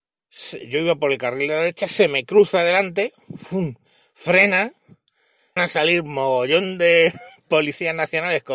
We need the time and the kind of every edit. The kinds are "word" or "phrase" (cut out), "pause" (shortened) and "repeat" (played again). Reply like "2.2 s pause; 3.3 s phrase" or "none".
5.6 s word